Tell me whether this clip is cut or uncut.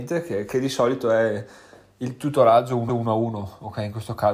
cut